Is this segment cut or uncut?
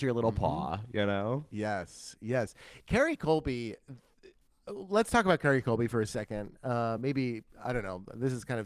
uncut